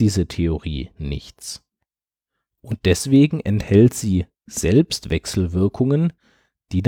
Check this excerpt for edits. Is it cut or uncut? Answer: uncut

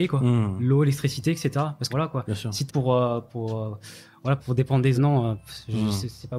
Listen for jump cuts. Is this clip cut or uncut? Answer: cut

